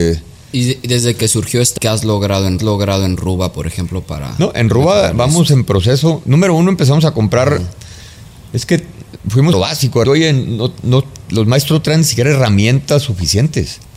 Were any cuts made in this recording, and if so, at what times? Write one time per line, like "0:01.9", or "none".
0:01.8
0:02.6
0:09.5
0:10.0